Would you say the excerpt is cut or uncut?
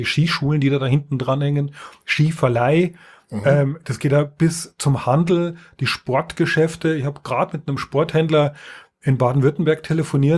uncut